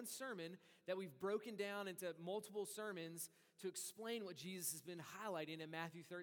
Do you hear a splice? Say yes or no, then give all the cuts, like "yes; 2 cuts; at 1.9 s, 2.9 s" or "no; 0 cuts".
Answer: no; 0 cuts